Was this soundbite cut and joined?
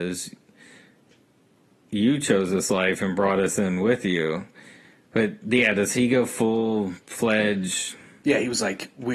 no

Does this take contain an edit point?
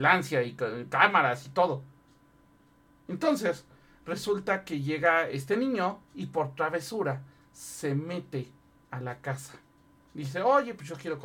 no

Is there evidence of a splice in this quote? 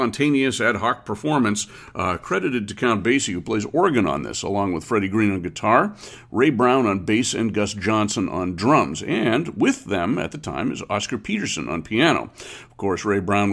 no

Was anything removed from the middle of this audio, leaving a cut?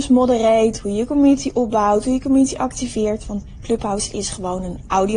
no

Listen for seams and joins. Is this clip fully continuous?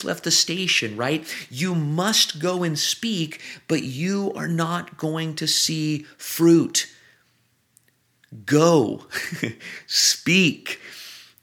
yes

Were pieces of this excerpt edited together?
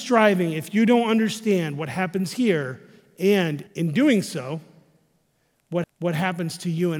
yes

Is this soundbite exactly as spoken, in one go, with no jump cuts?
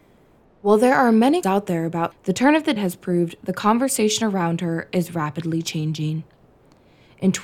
no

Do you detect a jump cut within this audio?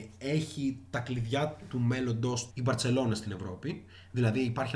yes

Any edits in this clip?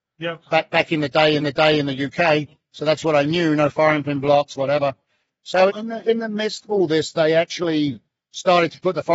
yes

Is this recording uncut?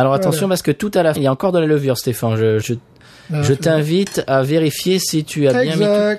no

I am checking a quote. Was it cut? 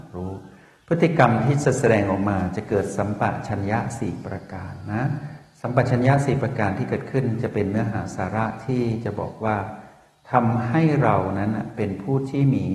no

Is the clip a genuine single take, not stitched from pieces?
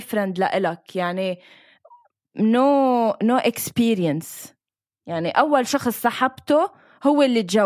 yes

